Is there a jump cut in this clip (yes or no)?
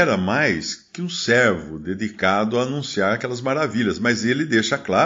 no